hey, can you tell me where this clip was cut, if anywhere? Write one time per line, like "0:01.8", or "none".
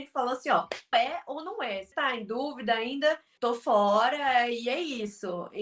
0:00.9
0:01.9
0:03.4

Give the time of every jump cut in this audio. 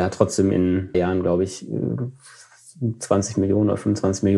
0:00.9

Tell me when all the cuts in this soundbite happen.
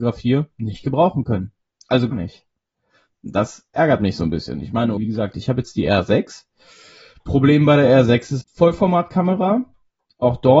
0:02.1
0:05.0
0:08.4

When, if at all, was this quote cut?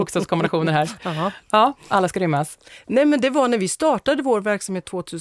none

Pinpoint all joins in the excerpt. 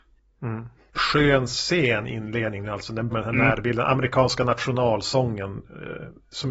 0:00.9
0:03.1

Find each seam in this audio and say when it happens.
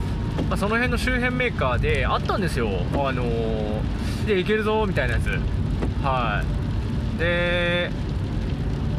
0:04.3

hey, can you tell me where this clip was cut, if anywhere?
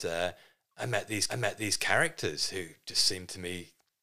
0:01.3

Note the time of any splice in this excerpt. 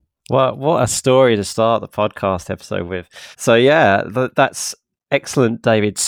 0:03.3

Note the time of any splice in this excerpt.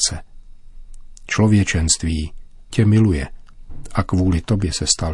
0:02.7

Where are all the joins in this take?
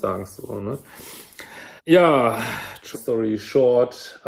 0:01.8
0:02.9

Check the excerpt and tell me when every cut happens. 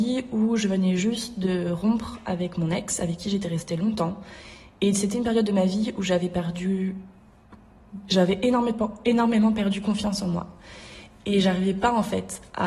none

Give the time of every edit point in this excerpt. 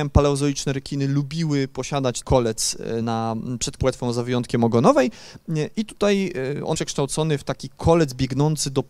0:02.2
0:03.0
0:03.8
0:06.7

